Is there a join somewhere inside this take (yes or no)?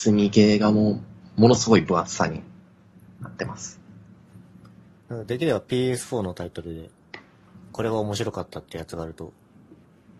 no